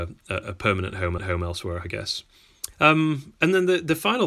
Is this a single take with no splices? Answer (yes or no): no